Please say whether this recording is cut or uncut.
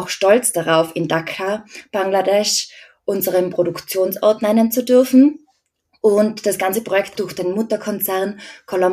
cut